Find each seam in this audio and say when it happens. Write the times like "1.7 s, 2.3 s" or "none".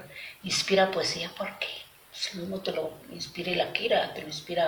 1.9 s, 3.0 s